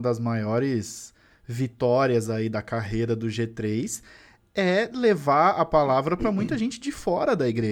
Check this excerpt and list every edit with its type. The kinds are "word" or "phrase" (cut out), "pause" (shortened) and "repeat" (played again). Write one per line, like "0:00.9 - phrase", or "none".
none